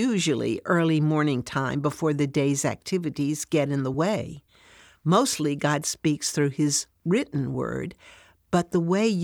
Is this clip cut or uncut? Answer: uncut